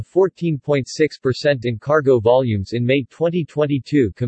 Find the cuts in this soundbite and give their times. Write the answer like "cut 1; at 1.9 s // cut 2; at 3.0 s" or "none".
cut 1; at 1.6 s